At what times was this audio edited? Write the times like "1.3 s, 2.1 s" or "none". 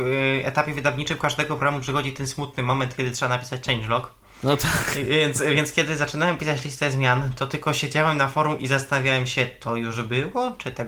none